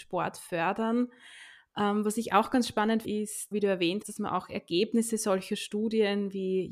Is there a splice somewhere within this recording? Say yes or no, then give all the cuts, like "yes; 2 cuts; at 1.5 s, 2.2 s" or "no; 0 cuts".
yes; 3 cuts; at 3.0 s, 3.5 s, 4.0 s